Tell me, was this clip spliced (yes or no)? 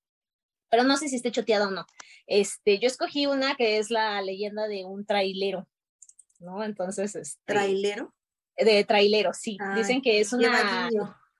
no